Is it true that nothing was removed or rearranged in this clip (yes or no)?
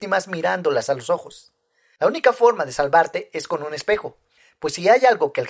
yes